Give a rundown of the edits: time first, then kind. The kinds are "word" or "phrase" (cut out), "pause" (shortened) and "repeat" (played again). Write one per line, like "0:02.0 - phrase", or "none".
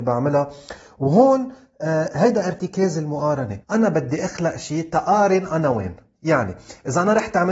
0:03.6 - pause